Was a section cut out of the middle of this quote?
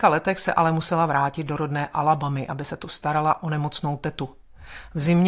no; 0 cuts

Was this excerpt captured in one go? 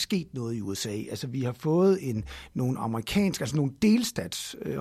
yes; 0 cuts

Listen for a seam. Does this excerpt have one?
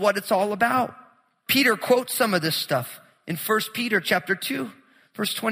no; 0 cuts

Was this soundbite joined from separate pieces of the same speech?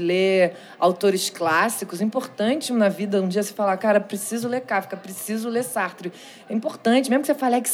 no; 0 cuts

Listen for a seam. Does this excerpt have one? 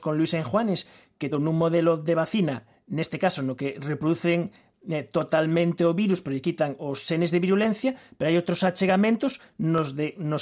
yes; 1 cut; at 1.3 s

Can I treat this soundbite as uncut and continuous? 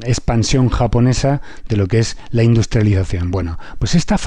yes; 0 cuts

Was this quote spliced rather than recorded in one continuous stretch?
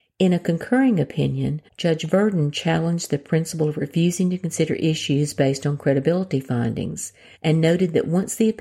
yes; 2 cuts; at 1.7 s, 7.3 s

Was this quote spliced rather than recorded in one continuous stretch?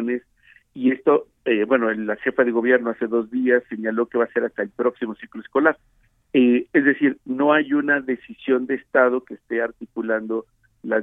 no; 0 cuts

